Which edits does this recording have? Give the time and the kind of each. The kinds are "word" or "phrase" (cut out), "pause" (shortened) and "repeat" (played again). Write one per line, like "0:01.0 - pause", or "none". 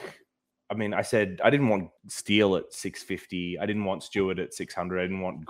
0:02.0 - pause